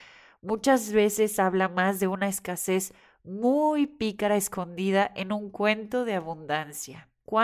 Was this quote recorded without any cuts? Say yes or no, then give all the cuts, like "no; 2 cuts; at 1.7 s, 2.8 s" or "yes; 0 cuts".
yes; 0 cuts